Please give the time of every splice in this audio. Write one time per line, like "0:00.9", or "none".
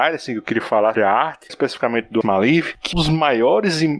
0:00.9
0:01.5
0:02.2
0:02.9